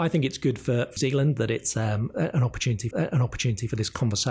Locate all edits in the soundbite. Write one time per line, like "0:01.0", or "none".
0:01.0
0:02.9

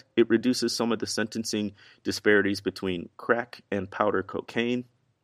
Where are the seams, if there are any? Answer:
none

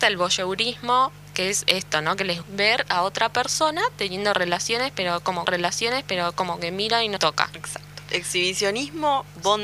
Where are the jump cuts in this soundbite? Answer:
0:02.4
0:05.5
0:07.2

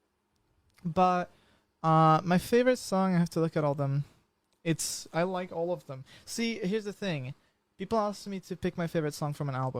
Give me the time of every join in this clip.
none

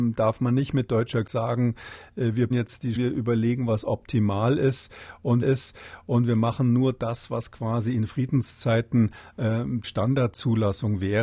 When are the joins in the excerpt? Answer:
0:01.3
0:02.5
0:03.0
0:05.4
0:09.8

